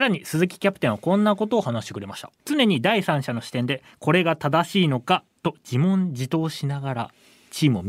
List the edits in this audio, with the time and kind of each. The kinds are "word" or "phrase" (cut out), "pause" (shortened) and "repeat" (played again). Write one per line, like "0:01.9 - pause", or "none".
0:02.4 - pause